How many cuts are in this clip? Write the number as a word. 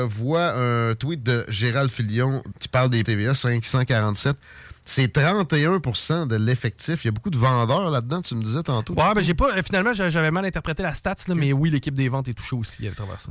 two